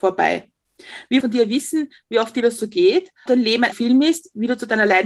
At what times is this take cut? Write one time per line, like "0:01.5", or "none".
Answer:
0:01.2
0:03.3
0:03.7